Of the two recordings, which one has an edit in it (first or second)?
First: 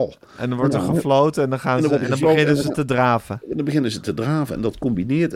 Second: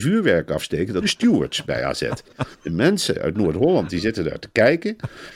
second